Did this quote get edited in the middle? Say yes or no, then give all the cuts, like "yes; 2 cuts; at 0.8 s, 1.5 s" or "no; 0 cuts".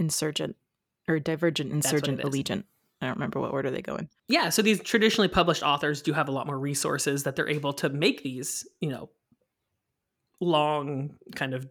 no; 0 cuts